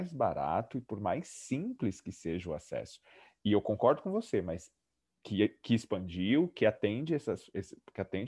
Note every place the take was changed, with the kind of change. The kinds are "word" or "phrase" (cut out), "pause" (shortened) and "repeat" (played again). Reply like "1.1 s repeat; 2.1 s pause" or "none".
none